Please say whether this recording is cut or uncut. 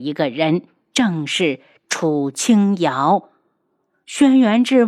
uncut